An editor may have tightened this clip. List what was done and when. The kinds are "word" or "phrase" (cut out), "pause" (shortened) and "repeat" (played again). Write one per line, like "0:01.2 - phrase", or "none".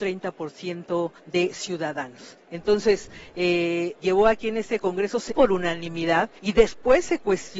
0:01.2 - pause
0:04.0 - word
0:05.3 - word
0:06.4 - pause